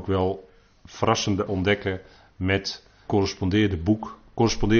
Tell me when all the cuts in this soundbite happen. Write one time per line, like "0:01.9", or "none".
0:01.5
0:03.1